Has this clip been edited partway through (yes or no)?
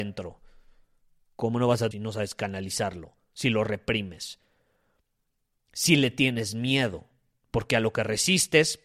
yes